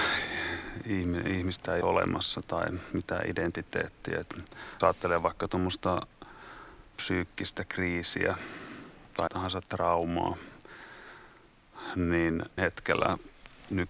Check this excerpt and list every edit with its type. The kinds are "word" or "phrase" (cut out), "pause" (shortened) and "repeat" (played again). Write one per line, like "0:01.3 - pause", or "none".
0:01.8 - word
0:02.9 - phrase
0:04.8 - word
0:09.3 - word
0:12.6 - word